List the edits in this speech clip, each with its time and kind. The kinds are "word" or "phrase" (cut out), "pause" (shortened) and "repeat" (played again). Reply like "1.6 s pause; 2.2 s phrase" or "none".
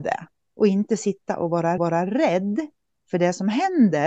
1.8 s repeat